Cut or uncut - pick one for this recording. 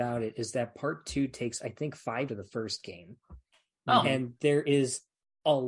cut